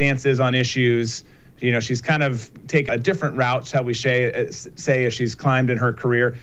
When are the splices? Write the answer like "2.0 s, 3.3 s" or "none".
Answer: 2.9 s